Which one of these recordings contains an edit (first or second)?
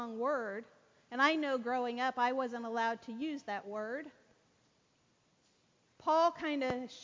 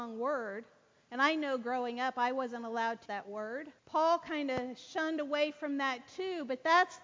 second